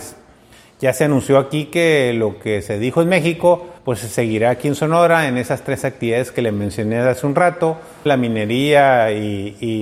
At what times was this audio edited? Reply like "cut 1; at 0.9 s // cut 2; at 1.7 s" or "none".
cut 1; at 3.8 s // cut 2; at 8.1 s